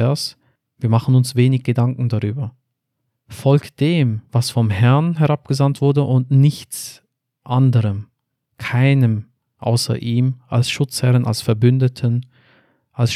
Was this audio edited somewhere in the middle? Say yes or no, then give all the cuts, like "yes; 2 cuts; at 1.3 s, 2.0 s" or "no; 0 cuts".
no; 0 cuts